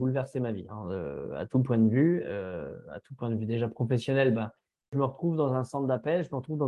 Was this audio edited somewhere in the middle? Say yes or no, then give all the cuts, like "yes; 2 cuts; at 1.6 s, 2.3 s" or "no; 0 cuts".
no; 0 cuts